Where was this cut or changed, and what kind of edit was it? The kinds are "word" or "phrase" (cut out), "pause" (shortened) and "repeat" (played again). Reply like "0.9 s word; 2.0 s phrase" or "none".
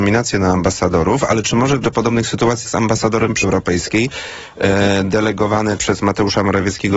1.8 s word; 2.6 s word; 3.4 s word; 5.8 s word